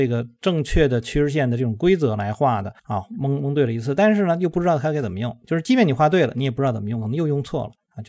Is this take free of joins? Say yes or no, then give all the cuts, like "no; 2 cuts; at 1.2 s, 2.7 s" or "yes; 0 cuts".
no; 1 cut; at 2.8 s